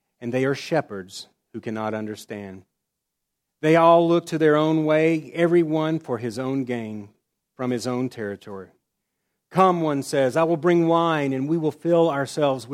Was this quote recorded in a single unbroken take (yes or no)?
yes